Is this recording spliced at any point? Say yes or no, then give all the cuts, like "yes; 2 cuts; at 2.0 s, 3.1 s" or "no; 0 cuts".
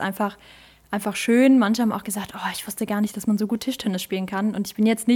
no; 0 cuts